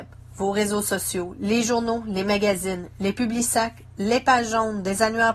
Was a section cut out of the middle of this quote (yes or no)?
no